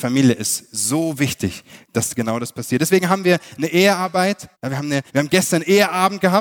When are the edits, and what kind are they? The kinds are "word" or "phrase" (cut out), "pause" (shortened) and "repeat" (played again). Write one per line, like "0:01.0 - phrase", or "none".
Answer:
0:01.8 - pause
0:04.5 - pause
0:05.1 - pause